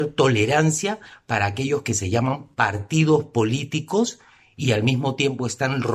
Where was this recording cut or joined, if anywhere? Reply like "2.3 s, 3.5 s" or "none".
none